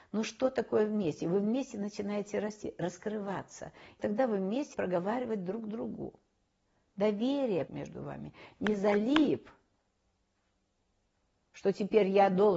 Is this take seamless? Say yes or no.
no